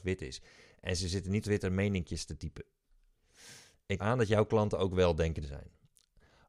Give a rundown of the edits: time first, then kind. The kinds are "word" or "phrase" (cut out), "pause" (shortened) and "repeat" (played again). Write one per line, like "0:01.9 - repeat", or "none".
0:01.4 - word
0:04.0 - phrase
0:05.4 - word

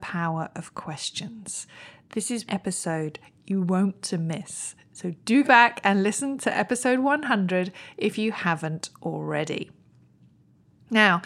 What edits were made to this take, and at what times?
0:02.5 - word
0:04.0 - word
0:05.4 - word

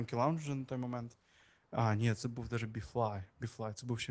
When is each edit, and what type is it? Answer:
none

